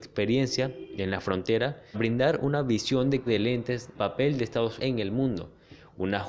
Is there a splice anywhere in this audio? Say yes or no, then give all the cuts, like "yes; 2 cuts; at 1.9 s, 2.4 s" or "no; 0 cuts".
yes; 4 cuts; at 1.9 s, 3.3 s, 3.9 s, 4.8 s